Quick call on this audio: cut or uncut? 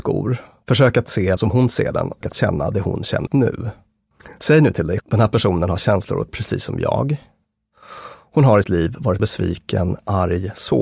cut